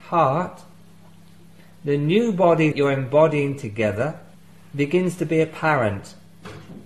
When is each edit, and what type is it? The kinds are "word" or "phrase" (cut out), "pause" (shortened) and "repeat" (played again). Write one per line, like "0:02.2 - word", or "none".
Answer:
0:02.7 - word
0:04.3 - pause